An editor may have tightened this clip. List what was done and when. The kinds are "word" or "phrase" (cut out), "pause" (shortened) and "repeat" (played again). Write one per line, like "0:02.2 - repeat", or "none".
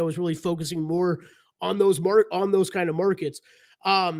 none